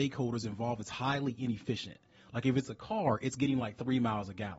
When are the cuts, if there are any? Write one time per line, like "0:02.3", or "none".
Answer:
none